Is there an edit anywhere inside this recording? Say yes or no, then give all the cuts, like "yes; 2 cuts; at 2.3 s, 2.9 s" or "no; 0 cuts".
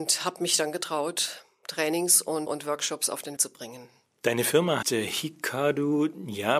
yes; 3 cuts; at 2.5 s, 3.4 s, 4.8 s